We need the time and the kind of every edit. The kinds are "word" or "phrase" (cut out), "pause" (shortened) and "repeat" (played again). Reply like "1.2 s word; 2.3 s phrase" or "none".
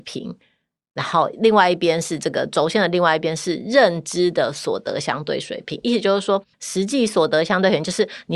6.5 s pause